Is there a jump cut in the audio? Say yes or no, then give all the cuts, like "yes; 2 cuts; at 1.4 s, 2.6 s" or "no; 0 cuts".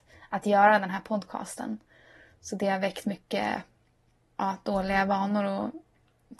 no; 0 cuts